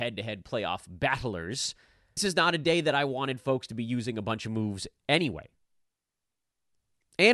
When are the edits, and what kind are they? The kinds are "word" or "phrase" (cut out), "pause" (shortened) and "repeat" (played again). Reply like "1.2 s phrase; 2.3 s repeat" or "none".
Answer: 2.2 s word